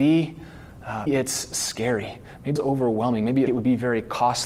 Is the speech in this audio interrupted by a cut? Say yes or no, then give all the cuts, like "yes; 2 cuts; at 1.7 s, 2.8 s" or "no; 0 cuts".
yes; 3 cuts; at 1.1 s, 2.6 s, 3.5 s